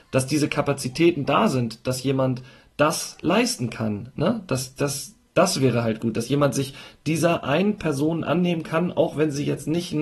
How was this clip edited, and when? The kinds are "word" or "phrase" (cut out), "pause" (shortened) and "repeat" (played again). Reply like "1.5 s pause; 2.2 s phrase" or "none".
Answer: none